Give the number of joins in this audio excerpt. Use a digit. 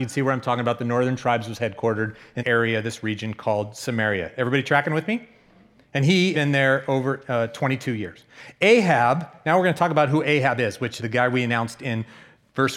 3